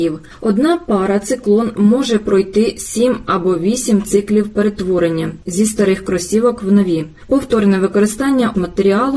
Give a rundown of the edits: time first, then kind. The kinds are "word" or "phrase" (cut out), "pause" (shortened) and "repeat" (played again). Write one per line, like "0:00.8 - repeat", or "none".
none